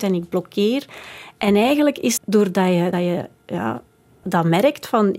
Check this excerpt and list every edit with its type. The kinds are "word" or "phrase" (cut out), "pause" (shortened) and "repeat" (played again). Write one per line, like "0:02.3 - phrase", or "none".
0:02.2 - word
0:02.9 - word
0:04.2 - word